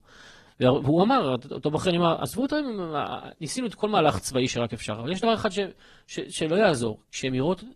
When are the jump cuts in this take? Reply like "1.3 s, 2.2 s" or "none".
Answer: none